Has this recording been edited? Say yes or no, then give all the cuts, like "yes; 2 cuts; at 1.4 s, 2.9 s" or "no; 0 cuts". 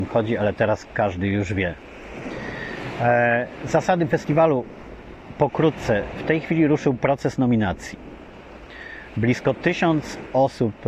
no; 0 cuts